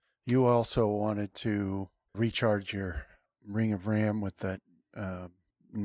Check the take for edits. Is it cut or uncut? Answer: cut